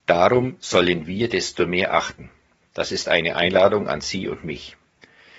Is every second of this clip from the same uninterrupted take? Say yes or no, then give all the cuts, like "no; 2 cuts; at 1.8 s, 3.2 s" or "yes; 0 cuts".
yes; 0 cuts